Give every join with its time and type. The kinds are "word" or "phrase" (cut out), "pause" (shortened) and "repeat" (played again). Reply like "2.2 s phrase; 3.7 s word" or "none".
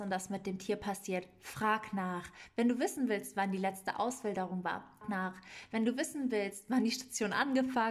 5.0 s word